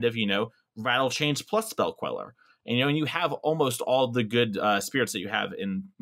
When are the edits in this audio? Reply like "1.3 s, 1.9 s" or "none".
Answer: none